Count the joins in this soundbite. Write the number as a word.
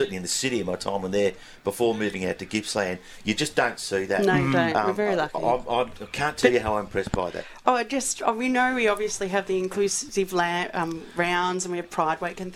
zero